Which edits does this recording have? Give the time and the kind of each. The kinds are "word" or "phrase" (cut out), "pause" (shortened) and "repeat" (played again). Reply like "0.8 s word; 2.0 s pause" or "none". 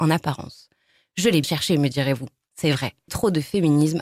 1.4 s word; 3.1 s word